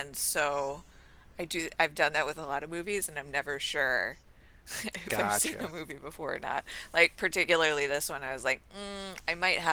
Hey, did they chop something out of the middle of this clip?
no; 0 cuts

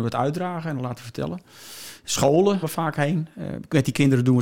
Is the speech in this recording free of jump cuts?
no; 1 cut; at 2.6 s

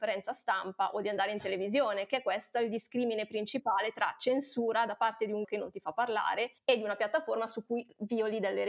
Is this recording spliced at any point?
yes; 2 cuts; at 5.4 s, 6.6 s

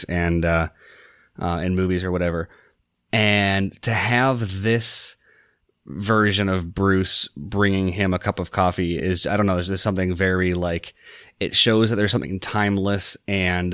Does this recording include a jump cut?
no; 0 cuts

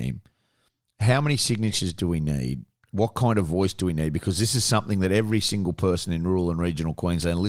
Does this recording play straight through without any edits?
yes; 0 cuts

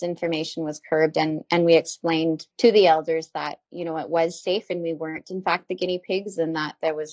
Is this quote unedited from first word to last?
no; 1 cut; at 2.5 s

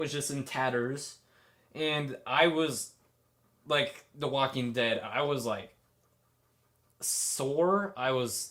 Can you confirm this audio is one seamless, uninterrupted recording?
yes; 0 cuts

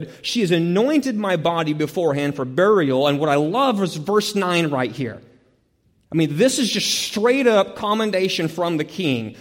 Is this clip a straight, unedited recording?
yes; 0 cuts

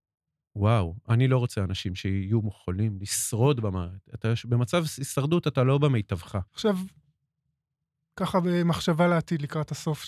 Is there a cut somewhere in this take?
yes; 1 cut; at 6.5 s

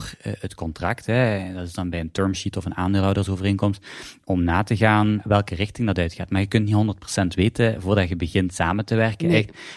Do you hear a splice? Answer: no; 0 cuts

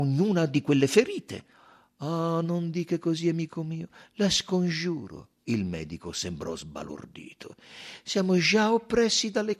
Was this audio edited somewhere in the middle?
no; 0 cuts

